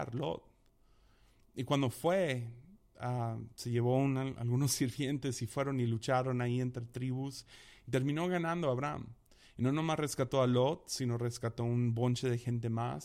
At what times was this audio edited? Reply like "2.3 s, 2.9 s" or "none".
none